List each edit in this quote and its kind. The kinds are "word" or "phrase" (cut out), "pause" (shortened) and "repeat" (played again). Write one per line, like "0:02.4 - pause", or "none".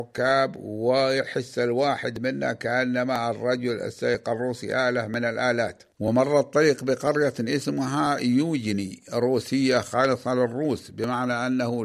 0:05.9 - pause